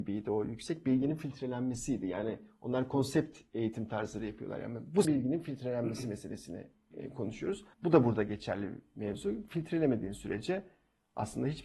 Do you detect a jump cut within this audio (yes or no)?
yes